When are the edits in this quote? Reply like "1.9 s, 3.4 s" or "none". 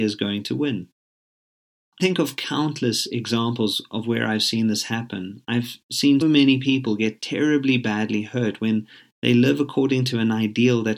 2.0 s, 6.2 s